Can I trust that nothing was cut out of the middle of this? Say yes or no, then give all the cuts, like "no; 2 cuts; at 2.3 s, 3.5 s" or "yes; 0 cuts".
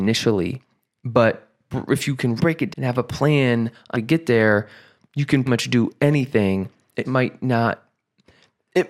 no; 5 cuts; at 2.4 s, 2.7 s, 3.9 s, 5.5 s, 7.0 s